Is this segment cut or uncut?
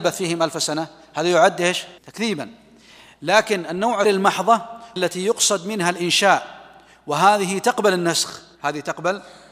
cut